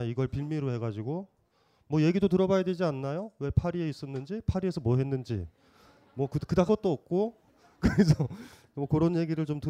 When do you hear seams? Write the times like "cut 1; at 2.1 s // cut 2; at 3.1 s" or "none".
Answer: cut 1; at 6.7 s